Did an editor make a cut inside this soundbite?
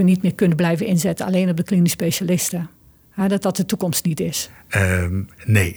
no; 0 cuts

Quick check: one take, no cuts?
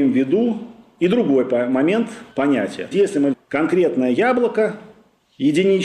no; 3 cuts; at 2.3 s, 2.9 s, 3.3 s

